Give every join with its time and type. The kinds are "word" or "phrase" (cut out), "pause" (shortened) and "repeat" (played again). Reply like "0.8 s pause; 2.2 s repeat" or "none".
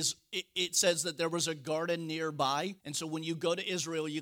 2.8 s pause